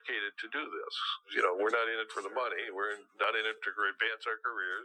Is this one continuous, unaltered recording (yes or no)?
yes